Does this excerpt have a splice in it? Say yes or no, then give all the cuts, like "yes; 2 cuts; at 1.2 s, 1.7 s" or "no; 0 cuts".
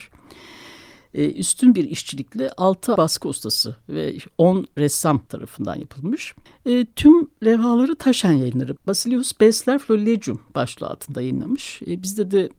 yes; 4 cuts; at 3.0 s, 5.3 s, 6.5 s, 8.8 s